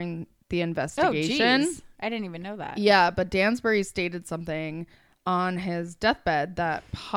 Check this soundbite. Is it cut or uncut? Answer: cut